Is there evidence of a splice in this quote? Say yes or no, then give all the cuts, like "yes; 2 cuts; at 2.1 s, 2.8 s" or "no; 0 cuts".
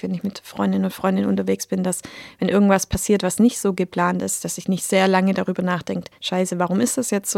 yes; 1 cut; at 6.2 s